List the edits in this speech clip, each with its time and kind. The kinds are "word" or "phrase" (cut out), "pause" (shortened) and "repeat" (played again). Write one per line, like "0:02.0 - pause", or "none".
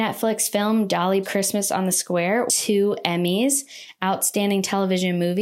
0:01.2 - word
0:02.5 - word